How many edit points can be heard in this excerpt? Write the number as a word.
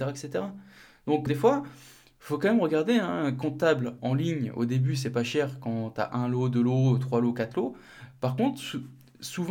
two